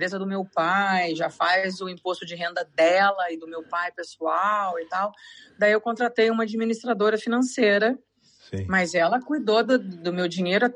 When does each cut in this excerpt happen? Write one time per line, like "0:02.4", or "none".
none